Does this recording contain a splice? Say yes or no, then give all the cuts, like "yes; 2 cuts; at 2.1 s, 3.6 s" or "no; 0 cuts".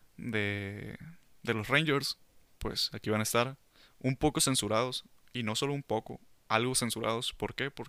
no; 0 cuts